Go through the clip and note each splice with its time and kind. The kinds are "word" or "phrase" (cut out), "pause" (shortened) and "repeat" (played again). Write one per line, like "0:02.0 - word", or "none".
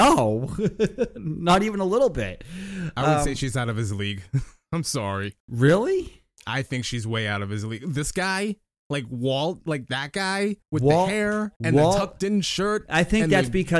0:05.4 - pause
0:10.6 - pause
0:11.6 - pause